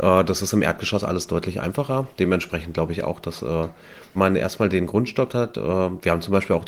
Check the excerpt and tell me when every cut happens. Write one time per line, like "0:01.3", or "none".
0:04.2
0:05.3